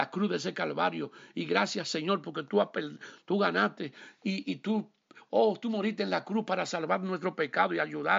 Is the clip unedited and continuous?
yes; 0 cuts

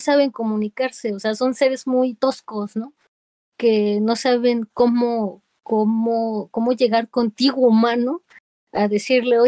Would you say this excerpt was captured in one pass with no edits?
yes; 0 cuts

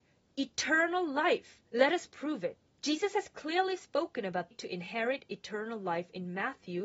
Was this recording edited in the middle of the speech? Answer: yes; 3 cuts; at 1.7 s, 2.7 s, 4.5 s

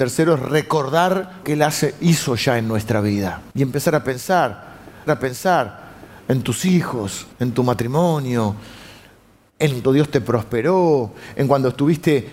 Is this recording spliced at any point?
yes; 5 cuts; at 1.4 s, 3.5 s, 5.1 s, 7.3 s, 9.8 s

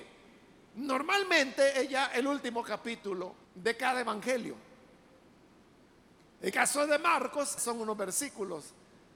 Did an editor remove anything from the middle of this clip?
yes; 3 cuts; at 3.4 s, 6.5 s, 7.6 s

